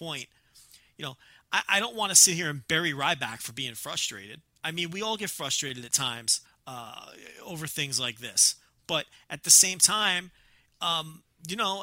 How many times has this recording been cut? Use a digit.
1